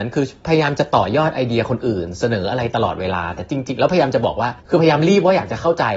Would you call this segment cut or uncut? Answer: cut